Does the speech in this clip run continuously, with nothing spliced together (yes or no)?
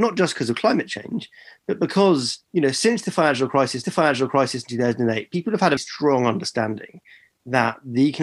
no